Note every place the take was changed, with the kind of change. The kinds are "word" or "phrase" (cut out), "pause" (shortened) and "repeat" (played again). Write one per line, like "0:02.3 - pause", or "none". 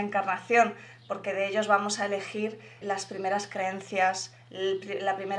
0:02.8 - word